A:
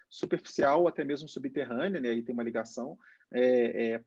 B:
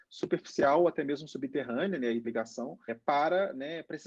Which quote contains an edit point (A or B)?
B